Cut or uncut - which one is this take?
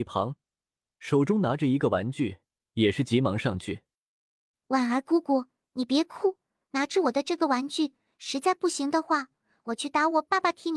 uncut